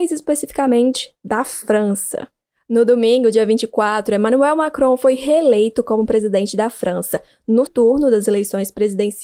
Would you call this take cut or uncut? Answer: cut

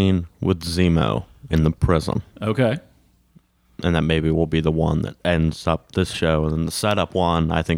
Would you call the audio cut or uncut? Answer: cut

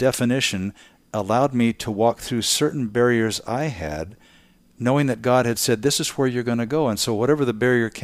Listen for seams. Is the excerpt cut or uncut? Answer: uncut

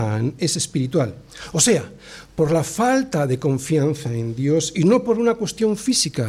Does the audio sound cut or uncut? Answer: uncut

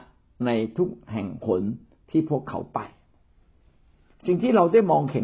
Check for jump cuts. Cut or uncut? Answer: uncut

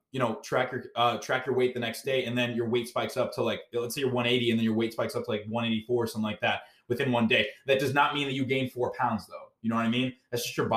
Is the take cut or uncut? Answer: uncut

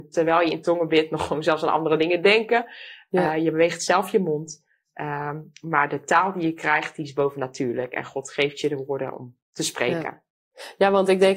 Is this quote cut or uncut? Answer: uncut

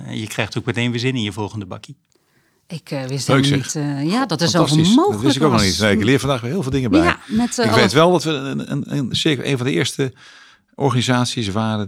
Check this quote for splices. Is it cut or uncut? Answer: uncut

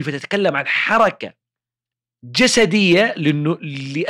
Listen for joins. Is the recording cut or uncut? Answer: uncut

